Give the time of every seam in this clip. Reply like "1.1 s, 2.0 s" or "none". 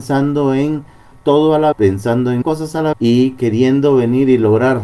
1.1 s, 1.7 s, 2.4 s, 2.9 s